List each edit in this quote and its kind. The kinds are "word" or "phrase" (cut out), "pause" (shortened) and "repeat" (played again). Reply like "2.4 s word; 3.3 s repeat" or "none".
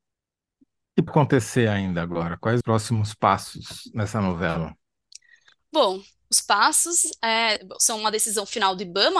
1.1 s word; 2.6 s word; 6.4 s word